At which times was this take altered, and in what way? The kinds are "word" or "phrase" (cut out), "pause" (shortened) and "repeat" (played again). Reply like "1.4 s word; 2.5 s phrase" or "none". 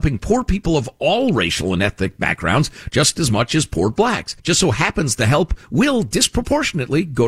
4.4 s pause